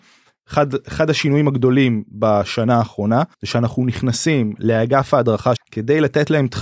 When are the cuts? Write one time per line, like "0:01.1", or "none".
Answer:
0:03.3
0:05.6